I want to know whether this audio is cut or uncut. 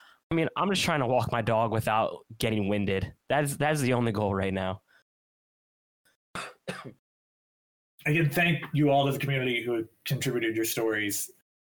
uncut